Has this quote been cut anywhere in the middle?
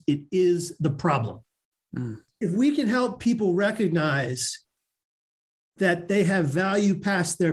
no; 0 cuts

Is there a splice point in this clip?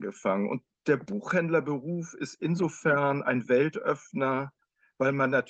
no; 0 cuts

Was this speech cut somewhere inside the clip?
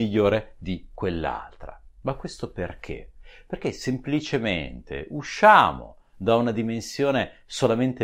no; 0 cuts

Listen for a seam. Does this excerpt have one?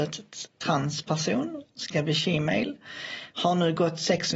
no; 0 cuts

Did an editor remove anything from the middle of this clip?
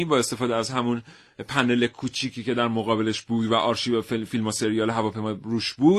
no; 0 cuts

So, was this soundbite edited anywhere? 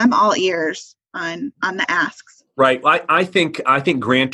no; 0 cuts

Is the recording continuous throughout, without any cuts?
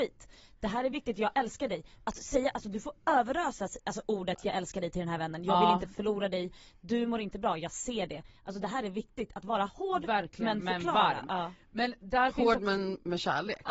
yes; 0 cuts

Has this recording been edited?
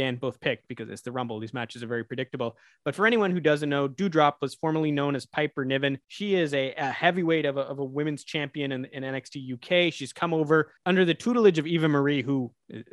yes; 2 cuts; at 6.0 s, 10.8 s

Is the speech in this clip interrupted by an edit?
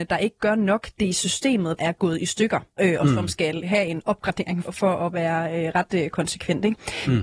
yes; 4 cuts; at 1.8 s, 2.7 s, 3.6 s, 4.6 s

